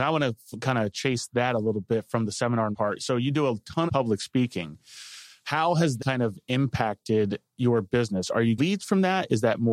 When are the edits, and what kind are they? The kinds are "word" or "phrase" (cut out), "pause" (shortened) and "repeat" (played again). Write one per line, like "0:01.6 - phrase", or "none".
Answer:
0:02.7 - word
0:03.9 - word
0:06.0 - word
0:08.6 - word